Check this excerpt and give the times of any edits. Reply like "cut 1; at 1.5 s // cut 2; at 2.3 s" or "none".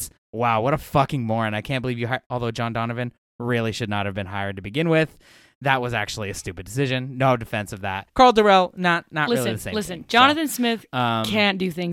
cut 1; at 8.1 s